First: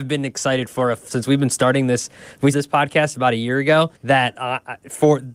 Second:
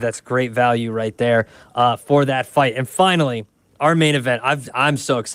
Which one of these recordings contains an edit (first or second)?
first